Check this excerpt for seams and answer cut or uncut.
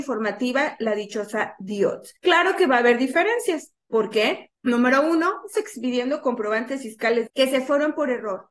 cut